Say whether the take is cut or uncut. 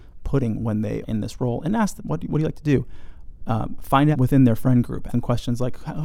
cut